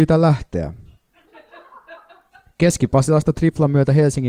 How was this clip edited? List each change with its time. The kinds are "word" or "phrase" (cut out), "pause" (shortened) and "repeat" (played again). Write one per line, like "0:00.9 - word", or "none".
0:03.3 - word